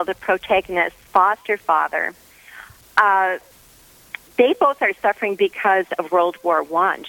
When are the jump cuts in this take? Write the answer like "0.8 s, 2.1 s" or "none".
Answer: 1.1 s, 4.3 s